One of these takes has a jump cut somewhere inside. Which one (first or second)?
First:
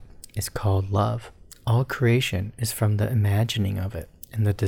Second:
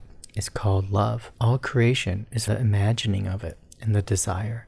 second